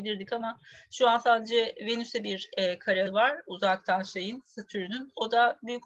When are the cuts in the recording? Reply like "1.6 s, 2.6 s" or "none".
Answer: 3.1 s